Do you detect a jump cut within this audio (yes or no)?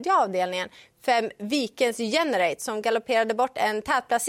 no